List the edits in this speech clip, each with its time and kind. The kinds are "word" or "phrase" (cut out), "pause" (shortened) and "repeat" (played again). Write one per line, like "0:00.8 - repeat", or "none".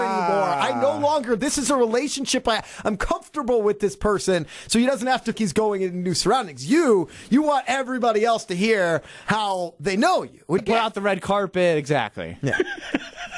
0:05.3 - phrase
0:10.6 - word